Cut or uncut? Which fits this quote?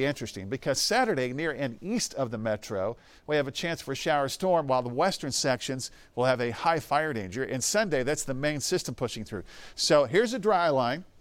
uncut